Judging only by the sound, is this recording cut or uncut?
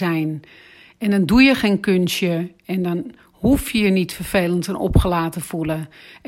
uncut